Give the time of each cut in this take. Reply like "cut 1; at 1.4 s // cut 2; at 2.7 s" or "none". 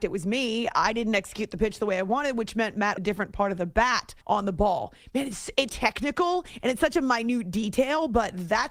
cut 1; at 3.0 s // cut 2; at 4.2 s // cut 3; at 5.7 s